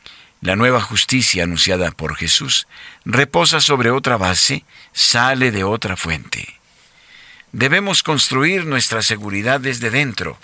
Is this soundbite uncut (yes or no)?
yes